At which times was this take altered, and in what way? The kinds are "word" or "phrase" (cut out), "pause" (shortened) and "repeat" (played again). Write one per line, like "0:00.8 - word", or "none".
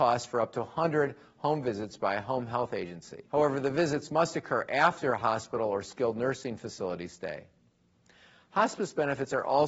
0:03.3 - pause